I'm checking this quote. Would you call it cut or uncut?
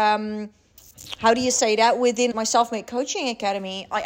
cut